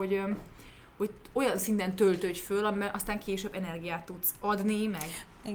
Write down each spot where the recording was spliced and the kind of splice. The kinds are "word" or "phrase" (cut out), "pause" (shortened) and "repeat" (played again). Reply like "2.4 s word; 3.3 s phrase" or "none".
none